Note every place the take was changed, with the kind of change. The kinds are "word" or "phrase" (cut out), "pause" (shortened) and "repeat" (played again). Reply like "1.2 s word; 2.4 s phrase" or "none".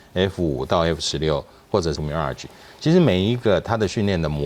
2.0 s word